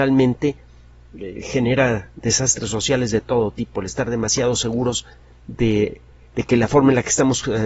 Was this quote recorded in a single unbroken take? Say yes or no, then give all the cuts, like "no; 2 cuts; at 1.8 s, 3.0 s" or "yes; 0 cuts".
yes; 0 cuts